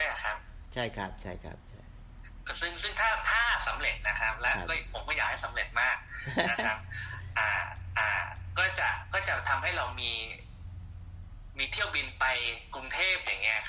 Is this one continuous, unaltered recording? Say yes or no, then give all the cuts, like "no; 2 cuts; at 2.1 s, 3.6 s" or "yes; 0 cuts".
no; 1 cut; at 7.9 s